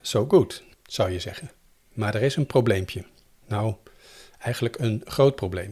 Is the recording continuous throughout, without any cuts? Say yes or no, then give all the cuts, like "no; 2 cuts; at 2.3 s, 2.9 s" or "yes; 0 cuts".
yes; 0 cuts